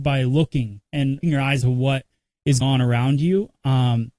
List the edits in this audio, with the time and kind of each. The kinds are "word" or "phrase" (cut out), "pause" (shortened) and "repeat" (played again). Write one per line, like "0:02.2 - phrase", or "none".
0:01.2 - word
0:01.6 - word
0:02.6 - word